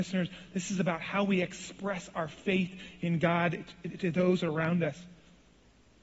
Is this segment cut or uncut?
uncut